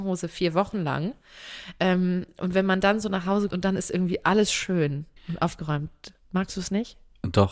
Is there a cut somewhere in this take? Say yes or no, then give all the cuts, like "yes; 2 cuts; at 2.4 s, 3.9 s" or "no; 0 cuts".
yes; 2 cuts; at 3.5 s, 5.2 s